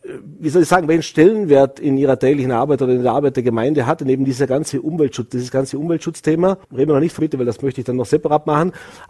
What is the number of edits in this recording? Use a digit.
2